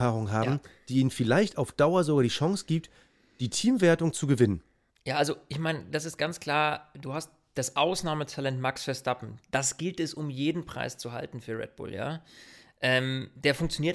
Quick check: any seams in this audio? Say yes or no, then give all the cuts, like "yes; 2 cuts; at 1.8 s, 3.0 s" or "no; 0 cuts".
no; 0 cuts